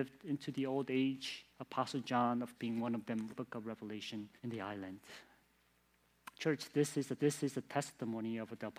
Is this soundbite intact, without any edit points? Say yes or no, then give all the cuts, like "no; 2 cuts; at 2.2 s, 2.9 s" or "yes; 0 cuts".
no; 5 cuts; at 1.5 s, 2.6 s, 3.3 s, 4.4 s, 7.2 s